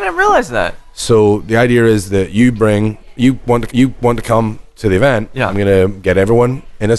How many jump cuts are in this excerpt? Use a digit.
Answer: 1